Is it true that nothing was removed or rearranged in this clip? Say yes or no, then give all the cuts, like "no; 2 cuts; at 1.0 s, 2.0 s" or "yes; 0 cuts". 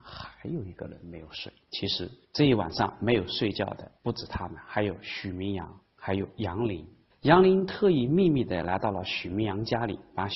no; 5 cuts; at 1.6 s, 2.2 s, 4.0 s, 5.9 s, 7.1 s